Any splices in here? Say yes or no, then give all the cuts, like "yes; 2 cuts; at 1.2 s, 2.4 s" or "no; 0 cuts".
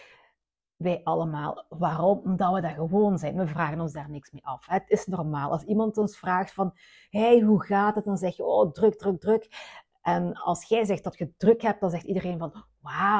no; 0 cuts